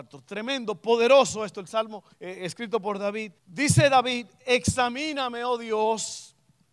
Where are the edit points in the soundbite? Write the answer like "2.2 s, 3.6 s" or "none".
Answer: 2.1 s, 3.4 s

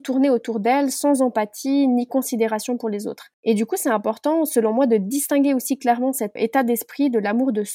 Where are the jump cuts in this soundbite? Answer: 3.3 s, 6.4 s

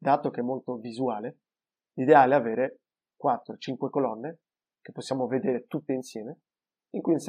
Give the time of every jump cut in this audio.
none

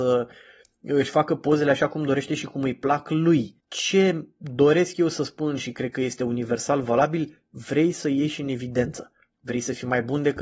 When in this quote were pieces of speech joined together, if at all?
3.6 s, 9.3 s

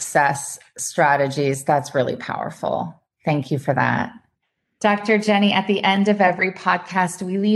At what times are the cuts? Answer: 4.3 s

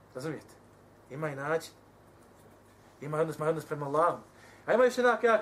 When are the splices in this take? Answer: 3.4 s

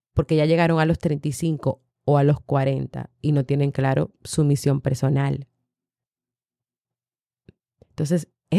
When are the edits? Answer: none

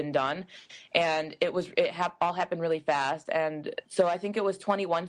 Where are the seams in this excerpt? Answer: 3.9 s

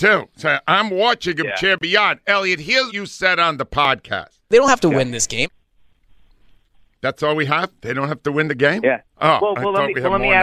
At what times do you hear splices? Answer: 2.9 s, 4.4 s

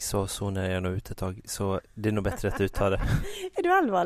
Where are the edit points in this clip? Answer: none

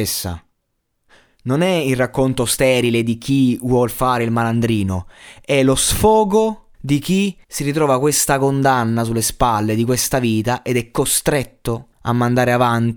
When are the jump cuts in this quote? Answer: 6.7 s, 7.4 s, 11.9 s

